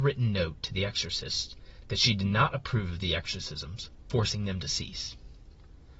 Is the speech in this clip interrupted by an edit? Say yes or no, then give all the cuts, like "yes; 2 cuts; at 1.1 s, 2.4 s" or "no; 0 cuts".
no; 0 cuts